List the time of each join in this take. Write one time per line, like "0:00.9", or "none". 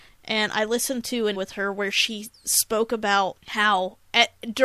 0:01.3
0:03.4